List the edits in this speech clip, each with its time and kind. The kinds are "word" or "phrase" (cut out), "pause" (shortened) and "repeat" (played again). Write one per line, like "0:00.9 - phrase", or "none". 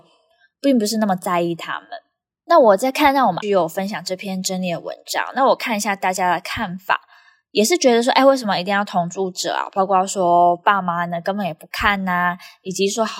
0:03.4 - word